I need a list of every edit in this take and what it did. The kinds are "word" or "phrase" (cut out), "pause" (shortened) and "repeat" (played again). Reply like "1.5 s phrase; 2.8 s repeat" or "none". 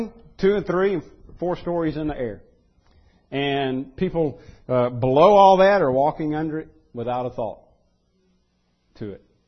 none